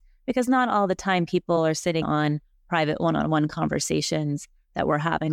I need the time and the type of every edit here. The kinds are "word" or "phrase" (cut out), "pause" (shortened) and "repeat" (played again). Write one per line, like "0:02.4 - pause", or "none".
0:02.0 - word